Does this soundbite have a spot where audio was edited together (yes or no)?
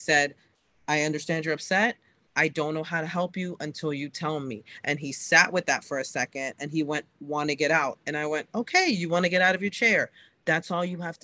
no